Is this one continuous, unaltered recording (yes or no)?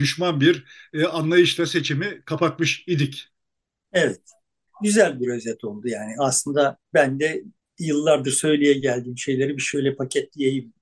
yes